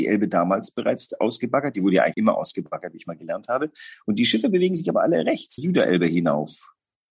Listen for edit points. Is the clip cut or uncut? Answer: cut